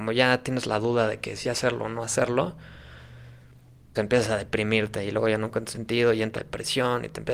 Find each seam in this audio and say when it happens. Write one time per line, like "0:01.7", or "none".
0:01.4
0:04.0
0:05.7
0:06.4